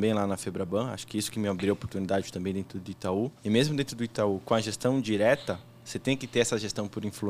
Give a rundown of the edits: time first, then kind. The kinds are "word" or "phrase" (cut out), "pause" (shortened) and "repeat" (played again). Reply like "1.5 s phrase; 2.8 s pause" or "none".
3.4 s pause